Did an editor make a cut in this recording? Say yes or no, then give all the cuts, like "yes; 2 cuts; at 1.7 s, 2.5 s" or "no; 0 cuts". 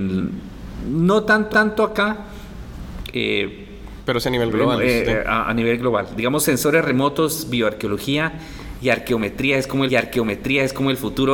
yes; 2 cuts; at 1.5 s, 9.9 s